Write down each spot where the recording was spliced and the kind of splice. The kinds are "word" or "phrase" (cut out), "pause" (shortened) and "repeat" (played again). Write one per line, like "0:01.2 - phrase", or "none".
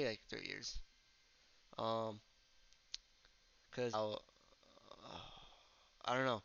0:03.9 - word

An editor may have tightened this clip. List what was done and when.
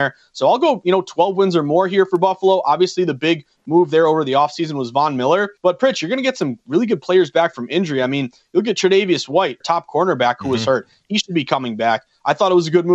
0:05.6 - pause
0:09.6 - phrase

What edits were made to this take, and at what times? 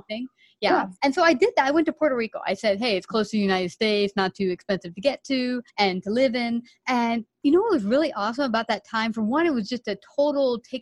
0:01.0 - pause
0:05.7 - pause

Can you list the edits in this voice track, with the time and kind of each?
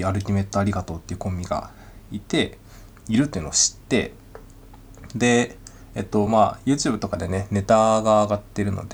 none

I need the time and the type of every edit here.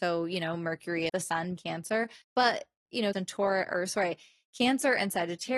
0:01.1 - word
0:01.6 - phrase
0:02.2 - pause
0:03.1 - phrase

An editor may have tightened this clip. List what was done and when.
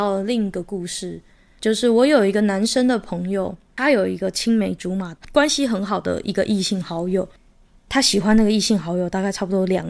none

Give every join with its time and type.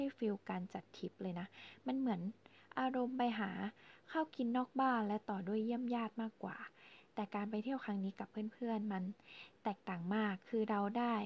none

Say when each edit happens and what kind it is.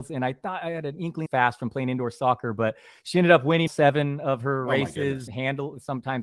0:01.3 - phrase
0:03.7 - word
0:05.3 - word

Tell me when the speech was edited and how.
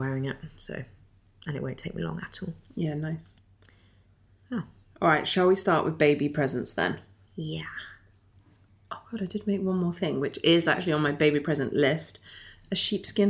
none

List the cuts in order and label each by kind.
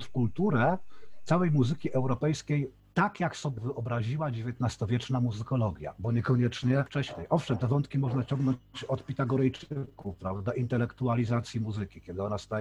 0:03.6 - word

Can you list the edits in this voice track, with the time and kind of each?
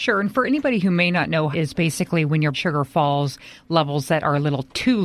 0:01.5 - word
0:02.5 - word

